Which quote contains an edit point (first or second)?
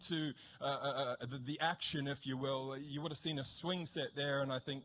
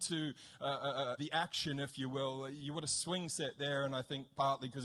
second